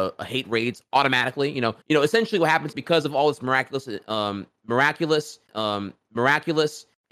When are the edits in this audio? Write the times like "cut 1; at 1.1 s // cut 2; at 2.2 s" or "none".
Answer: cut 1; at 1.8 s // cut 2; at 2.7 s // cut 3; at 5.5 s